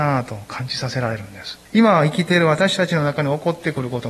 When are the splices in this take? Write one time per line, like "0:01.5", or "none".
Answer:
0:01.7

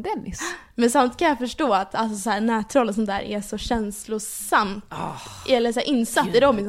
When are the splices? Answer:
none

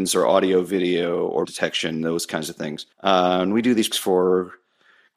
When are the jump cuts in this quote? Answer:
0:01.5
0:02.9
0:03.9

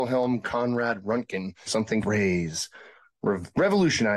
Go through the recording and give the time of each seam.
0:01.7
0:02.0

